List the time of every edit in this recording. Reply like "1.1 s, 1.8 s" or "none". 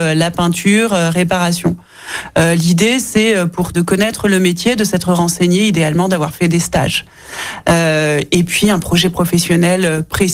3.7 s